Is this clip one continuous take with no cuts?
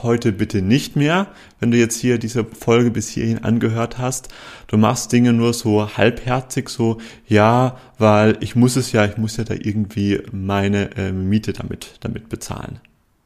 yes; 0 cuts

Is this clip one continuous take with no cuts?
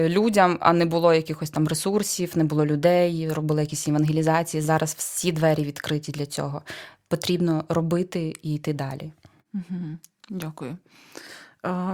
yes; 0 cuts

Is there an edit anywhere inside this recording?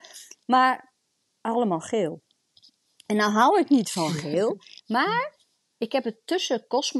no; 0 cuts

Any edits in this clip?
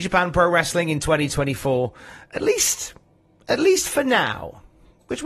no; 0 cuts

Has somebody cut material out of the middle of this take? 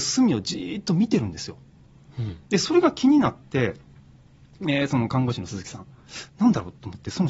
yes; 1 cut; at 6.3 s

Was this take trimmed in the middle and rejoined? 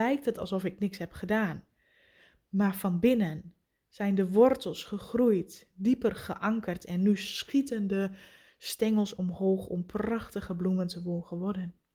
no; 0 cuts

